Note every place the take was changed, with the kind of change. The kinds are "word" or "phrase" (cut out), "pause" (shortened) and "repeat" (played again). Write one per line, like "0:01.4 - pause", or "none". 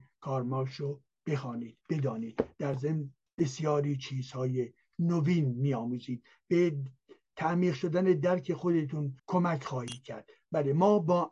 0:01.8 - pause
0:03.3 - pause
0:09.2 - pause

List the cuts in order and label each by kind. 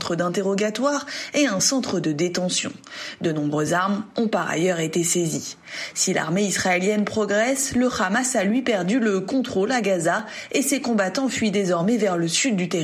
none

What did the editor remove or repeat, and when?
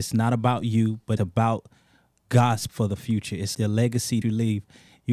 0:01.2 - word
0:02.7 - word
0:03.5 - word
0:04.2 - word

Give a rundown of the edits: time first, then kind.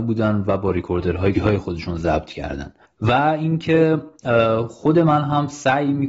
0:01.3 - word
0:02.8 - pause

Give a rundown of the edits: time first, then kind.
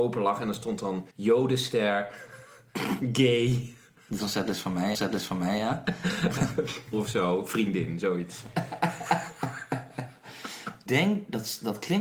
0:01.1 - pause
0:04.2 - phrase
0:04.9 - repeat
0:06.9 - word
0:10.9 - word

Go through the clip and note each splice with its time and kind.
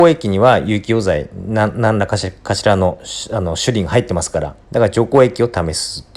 0:04.6 - pause

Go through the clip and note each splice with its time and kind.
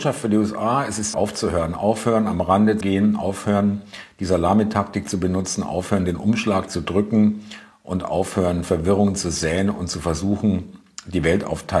0:01.1 - word
0:02.8 - word

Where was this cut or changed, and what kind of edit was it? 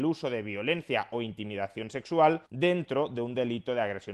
0:02.5 - pause

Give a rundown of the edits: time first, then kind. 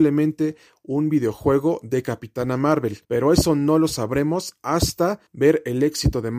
0:03.0 - pause
0:05.3 - pause

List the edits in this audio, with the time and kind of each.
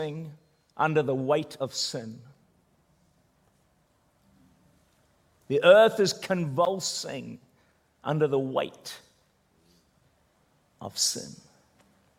none

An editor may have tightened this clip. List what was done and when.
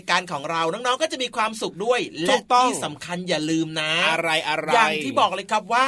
none

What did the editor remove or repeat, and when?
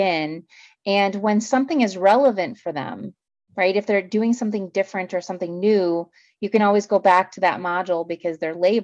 none

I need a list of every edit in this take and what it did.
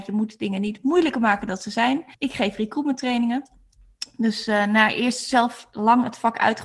0:02.1 - pause

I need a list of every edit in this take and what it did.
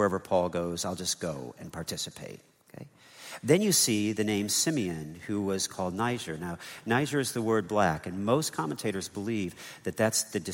none

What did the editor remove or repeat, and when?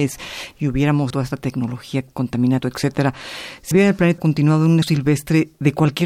0:01.1 - word
0:02.6 - word
0:03.7 - word
0:04.2 - word
0:04.8 - word

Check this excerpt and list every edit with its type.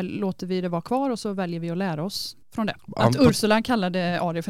0:02.4 - pause
0:02.8 - pause

